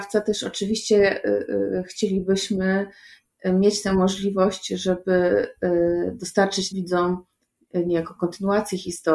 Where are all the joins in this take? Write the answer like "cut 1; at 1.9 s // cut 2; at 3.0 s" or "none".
cut 1; at 6.7 s